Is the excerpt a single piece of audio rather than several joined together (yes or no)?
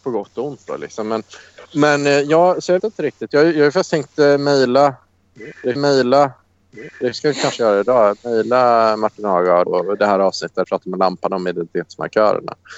no